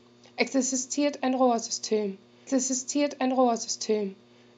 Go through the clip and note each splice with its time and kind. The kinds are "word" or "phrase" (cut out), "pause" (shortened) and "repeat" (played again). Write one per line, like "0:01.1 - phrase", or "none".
0:02.5 - repeat